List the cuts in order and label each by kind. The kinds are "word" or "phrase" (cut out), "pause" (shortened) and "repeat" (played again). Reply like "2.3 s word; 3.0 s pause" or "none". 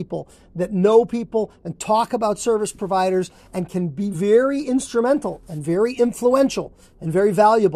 none